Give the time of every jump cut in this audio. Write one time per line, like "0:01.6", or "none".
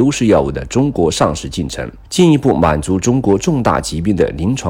0:02.0